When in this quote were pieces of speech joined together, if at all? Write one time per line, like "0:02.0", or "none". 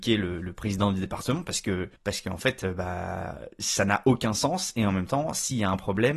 0:02.0